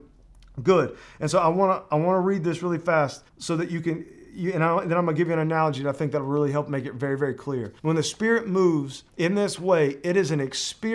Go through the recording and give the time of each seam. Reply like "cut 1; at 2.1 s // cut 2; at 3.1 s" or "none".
cut 1; at 3.3 s // cut 2; at 7.8 s // cut 3; at 9.1 s